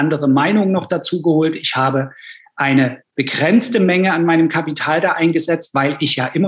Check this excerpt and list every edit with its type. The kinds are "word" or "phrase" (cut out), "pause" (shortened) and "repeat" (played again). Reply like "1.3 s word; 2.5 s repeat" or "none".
3.1 s pause